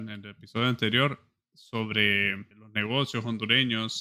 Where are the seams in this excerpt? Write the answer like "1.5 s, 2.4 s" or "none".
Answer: 2.5 s